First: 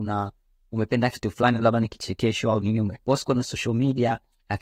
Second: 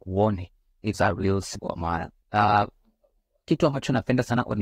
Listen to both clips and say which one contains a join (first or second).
second